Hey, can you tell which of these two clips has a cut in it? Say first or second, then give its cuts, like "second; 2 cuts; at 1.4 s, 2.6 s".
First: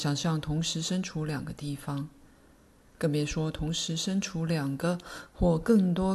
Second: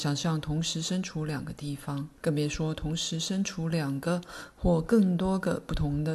second; 1 cut; at 2.2 s